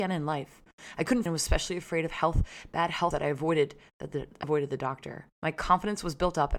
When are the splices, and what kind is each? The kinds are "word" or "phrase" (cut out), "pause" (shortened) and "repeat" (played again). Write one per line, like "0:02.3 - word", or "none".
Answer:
0:01.3 - word
0:03.1 - word
0:04.4 - word
0:05.3 - pause